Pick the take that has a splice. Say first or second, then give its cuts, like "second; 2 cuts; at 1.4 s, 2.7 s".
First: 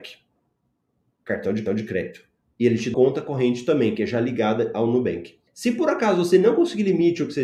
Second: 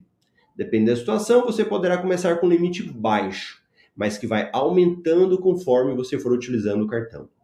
first; 3 cuts; at 1.7 s, 2.9 s, 5.5 s